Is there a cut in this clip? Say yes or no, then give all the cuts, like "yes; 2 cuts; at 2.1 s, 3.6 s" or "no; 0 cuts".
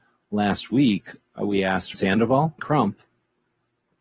yes; 2 cuts; at 1.9 s, 2.6 s